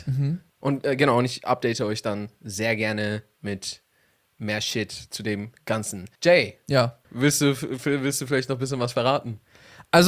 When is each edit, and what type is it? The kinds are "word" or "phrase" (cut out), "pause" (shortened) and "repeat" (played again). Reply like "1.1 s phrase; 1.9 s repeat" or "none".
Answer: 6.1 s pause; 7.0 s pause